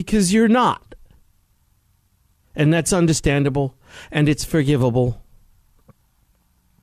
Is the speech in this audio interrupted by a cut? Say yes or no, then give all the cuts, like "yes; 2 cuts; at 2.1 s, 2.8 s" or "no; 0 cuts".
no; 0 cuts